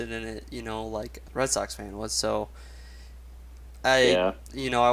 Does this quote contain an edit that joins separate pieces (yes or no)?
yes